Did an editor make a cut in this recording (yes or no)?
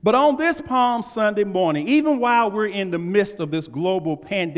no